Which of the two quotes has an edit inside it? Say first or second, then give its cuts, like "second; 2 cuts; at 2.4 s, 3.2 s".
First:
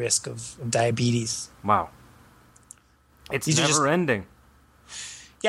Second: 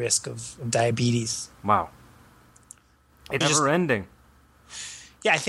second; 1 cut; at 3.4 s